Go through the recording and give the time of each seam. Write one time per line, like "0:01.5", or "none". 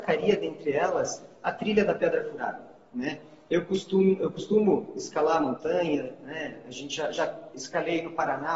none